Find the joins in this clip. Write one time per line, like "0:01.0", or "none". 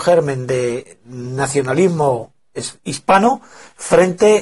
none